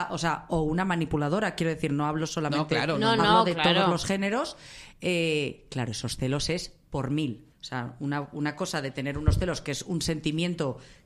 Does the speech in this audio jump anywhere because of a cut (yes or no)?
yes